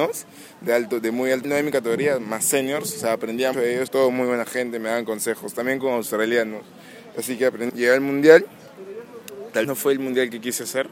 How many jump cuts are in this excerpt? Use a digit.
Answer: 5